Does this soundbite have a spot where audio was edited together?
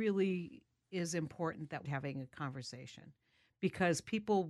yes; 1 cut; at 1.8 s

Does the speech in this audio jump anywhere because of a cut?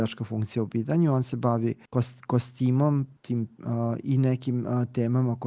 yes; 2 cuts; at 1.9 s, 3.2 s

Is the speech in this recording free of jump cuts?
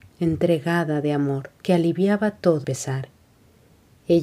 no; 2 cuts; at 1.6 s, 2.6 s

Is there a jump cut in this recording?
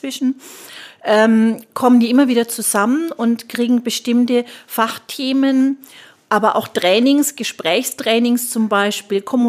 no; 0 cuts

